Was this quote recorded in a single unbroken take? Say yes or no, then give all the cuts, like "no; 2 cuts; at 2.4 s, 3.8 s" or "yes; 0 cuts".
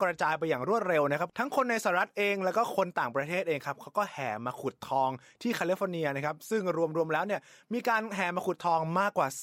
yes; 0 cuts